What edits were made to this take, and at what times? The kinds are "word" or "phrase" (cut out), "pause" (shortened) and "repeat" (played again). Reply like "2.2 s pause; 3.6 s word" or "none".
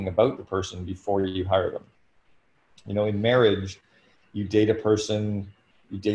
none